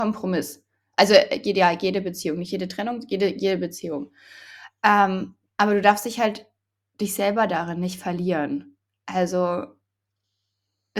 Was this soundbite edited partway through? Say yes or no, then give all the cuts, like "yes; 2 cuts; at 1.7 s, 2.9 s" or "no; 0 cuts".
no; 0 cuts